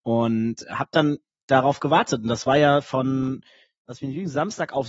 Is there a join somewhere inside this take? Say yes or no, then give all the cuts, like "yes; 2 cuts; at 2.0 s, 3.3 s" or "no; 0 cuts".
no; 0 cuts